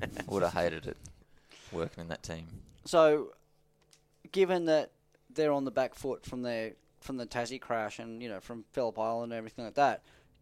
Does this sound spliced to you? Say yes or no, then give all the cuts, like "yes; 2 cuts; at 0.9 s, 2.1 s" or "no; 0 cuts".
no; 0 cuts